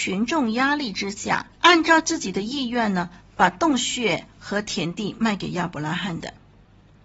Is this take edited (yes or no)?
no